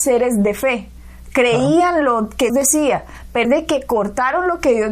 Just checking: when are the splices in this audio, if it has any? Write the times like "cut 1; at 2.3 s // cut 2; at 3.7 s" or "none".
cut 1; at 2.5 s // cut 2; at 3.4 s